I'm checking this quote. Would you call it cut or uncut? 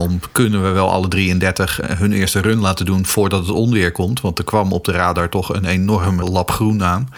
cut